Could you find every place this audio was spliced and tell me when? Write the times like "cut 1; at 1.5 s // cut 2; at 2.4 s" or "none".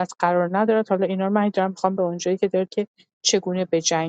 cut 1; at 2.0 s // cut 2; at 2.7 s